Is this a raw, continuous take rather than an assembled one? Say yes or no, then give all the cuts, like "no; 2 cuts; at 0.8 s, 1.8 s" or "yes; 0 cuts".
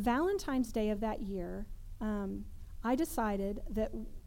yes; 0 cuts